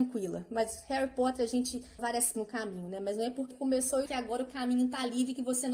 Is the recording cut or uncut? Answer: cut